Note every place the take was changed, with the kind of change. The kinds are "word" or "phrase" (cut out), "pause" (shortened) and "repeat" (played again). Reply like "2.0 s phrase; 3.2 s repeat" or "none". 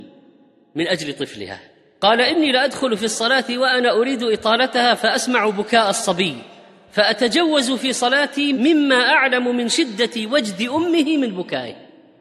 none